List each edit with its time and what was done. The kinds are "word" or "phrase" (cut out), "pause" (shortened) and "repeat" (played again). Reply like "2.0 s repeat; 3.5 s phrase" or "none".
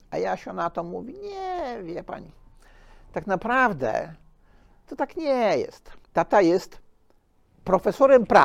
6.0 s pause